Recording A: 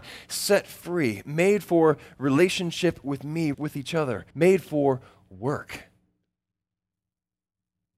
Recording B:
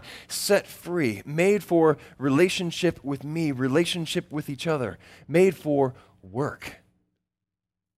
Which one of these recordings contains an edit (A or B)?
A